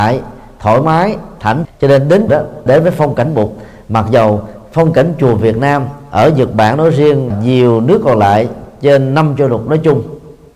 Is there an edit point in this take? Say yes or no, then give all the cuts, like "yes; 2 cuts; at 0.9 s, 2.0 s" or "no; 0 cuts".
yes; 4 cuts; at 1.6 s, 2.3 s, 2.7 s, 7.3 s